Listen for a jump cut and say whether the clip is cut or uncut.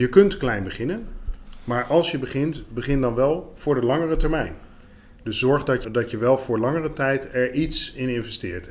cut